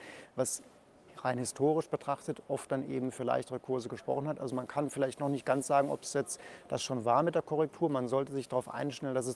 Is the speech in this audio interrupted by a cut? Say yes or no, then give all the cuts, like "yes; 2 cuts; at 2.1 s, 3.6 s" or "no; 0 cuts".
no; 0 cuts